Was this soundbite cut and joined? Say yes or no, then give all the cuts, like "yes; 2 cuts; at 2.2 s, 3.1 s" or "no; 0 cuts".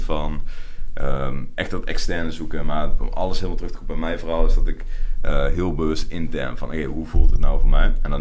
yes; 1 cut; at 3.0 s